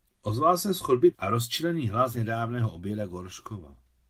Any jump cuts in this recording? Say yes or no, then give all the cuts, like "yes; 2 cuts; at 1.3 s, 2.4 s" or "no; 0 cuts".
yes; 2 cuts; at 1.1 s, 2.1 s